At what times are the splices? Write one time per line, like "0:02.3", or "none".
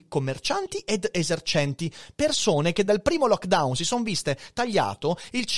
none